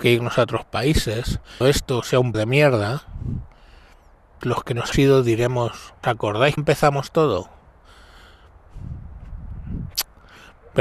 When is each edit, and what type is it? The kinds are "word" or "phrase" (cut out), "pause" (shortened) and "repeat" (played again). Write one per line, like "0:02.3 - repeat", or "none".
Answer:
0:01.6 - word
0:02.3 - word
0:04.4 - word
0:04.9 - word
0:06.0 - word
0:06.6 - word